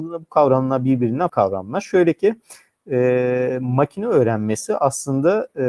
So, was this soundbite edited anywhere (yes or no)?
yes